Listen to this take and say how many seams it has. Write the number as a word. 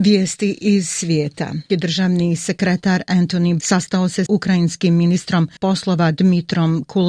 four